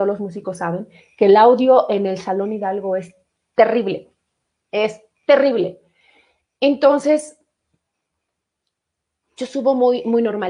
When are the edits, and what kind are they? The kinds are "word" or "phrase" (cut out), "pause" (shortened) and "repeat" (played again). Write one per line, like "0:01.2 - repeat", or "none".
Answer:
none

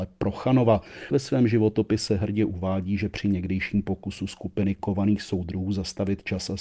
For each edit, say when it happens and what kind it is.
0:01.1 - word

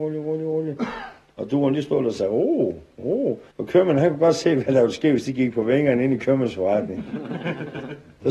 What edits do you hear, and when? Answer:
0:03.5 - pause

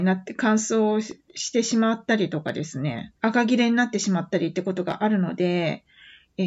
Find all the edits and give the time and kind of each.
0:03.2 - pause

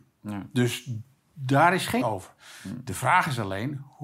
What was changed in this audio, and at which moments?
0:02.0 - word

